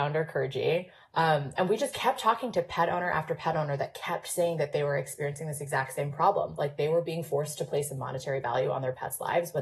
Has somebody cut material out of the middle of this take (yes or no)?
no